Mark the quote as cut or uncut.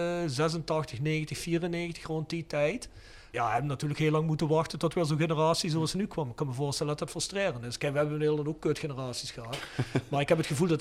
uncut